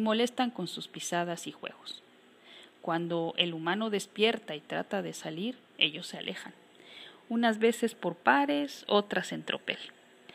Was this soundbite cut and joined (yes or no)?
yes